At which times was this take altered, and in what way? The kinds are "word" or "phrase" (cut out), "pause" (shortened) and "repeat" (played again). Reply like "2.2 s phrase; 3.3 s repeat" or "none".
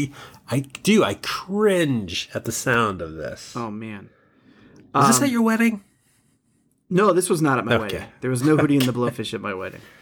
none